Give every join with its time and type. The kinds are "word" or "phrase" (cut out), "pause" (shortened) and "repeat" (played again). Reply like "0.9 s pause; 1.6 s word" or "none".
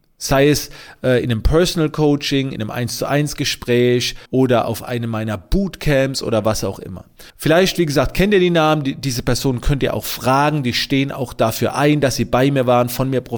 4.3 s pause; 7.3 s pause